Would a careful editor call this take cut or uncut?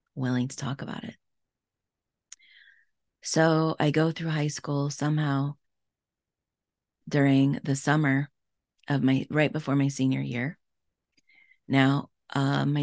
uncut